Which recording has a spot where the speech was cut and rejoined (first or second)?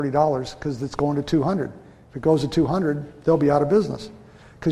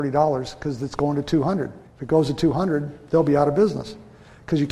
second